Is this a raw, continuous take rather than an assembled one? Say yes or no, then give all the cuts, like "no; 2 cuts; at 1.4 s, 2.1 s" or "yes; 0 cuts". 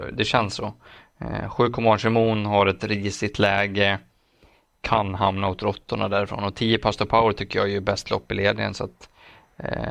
yes; 0 cuts